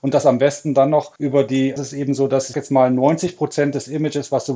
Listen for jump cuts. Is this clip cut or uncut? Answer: cut